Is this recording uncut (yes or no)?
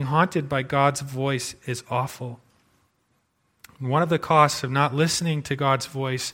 yes